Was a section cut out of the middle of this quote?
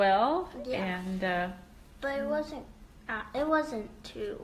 no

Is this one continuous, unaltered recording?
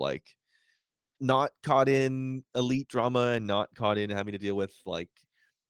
yes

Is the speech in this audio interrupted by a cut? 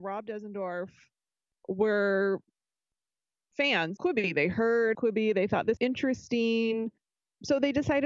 yes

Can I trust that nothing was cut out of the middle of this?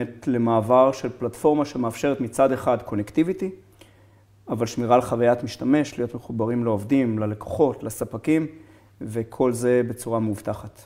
yes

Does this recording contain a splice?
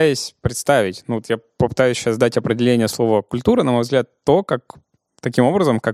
no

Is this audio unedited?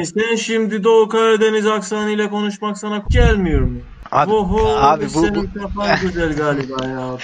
no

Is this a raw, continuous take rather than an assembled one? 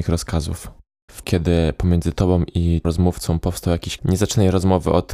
no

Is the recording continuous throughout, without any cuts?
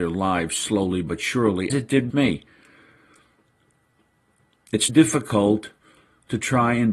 no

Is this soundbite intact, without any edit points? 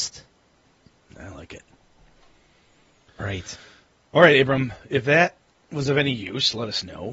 yes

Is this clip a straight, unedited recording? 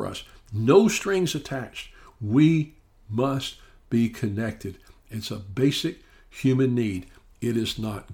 yes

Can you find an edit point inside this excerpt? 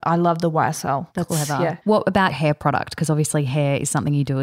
yes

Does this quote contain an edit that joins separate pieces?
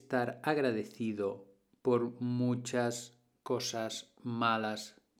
no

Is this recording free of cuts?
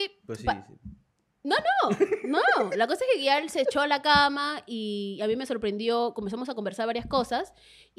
yes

